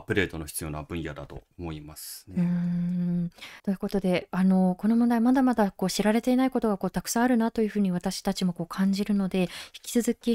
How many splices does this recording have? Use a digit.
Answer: 2